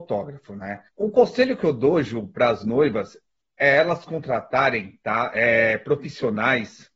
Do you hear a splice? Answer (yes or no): no